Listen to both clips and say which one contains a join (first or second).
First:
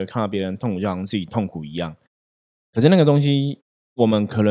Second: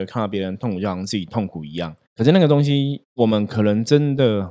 second